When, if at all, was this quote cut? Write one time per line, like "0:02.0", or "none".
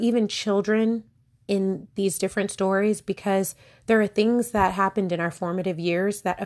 none